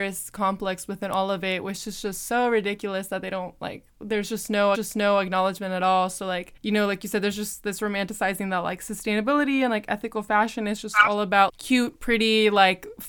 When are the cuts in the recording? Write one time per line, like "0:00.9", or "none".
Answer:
0:04.7
0:06.6
0:11.5